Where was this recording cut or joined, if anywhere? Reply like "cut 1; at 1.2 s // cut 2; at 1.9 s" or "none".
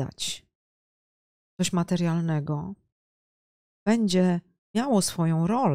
cut 1; at 4.6 s